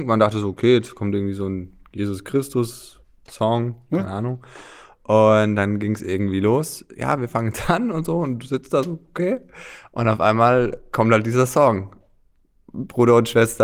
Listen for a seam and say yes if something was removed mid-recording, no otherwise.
no